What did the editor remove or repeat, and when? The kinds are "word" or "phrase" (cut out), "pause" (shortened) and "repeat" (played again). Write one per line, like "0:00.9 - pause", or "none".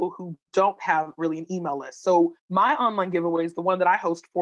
0:02.4 - pause